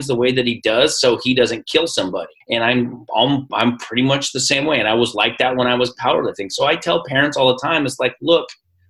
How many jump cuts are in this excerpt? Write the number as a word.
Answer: one